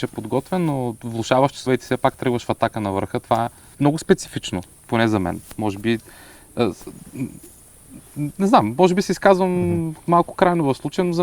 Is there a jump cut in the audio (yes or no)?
yes